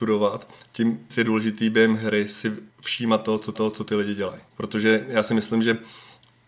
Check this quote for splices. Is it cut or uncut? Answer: cut